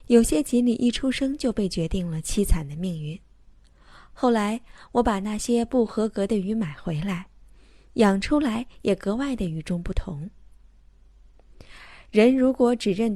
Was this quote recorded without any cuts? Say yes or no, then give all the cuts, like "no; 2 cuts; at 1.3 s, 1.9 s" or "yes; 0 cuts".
yes; 0 cuts